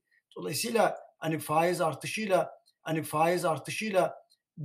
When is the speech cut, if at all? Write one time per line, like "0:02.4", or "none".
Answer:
0:02.8